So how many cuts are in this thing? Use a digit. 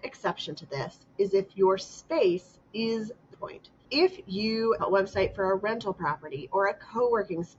4